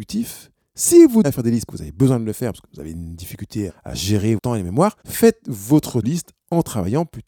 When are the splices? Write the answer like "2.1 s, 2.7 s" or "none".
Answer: 1.2 s, 1.7 s, 3.7 s, 4.4 s, 5.0 s, 6.0 s